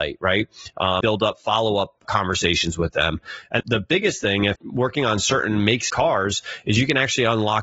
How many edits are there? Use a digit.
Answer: 5